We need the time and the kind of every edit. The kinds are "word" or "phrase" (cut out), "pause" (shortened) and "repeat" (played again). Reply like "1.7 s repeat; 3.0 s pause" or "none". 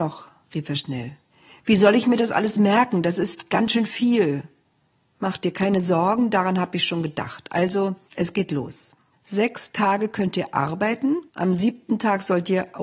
1.3 s pause; 4.6 s pause; 8.1 s pause; 9.1 s pause; 11.3 s pause